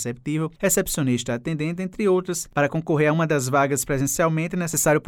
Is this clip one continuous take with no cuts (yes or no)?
yes